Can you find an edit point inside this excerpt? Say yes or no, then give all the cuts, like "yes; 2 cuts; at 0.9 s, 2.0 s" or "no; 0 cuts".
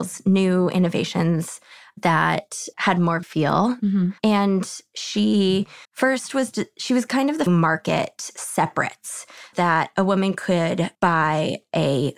yes; 7 cuts; at 2.7 s, 3.2 s, 4.2 s, 5.8 s, 7.5 s, 9.5 s, 10.9 s